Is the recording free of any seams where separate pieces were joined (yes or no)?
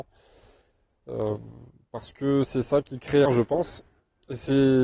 no